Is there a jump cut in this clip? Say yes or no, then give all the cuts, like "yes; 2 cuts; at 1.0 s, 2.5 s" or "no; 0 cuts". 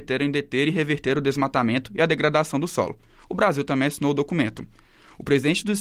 no; 0 cuts